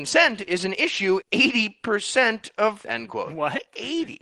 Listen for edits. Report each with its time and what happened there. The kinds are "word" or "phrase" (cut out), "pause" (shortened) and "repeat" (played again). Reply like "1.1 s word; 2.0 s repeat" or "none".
1.2 s word; 2.8 s phrase